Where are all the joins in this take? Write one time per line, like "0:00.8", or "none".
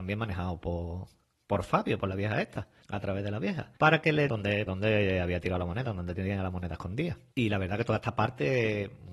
0:03.8
0:04.3
0:04.7